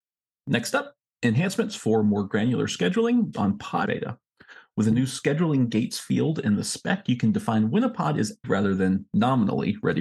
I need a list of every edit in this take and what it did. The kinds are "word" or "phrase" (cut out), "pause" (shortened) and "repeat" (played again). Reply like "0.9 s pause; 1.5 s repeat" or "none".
3.3 s word; 3.8 s phrase; 8.4 s word